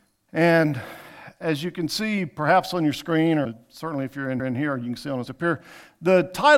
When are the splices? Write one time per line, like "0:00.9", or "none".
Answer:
0:03.4
0:04.4
0:05.3